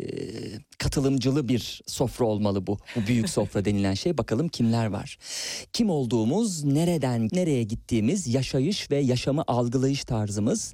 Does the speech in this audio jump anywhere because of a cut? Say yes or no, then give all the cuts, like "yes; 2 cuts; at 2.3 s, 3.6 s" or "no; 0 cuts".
yes; 1 cut; at 7.3 s